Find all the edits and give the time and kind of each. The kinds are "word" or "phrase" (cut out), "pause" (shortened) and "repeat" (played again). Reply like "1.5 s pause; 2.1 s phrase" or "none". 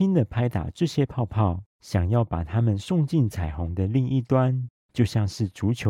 1.7 s pause; 4.8 s pause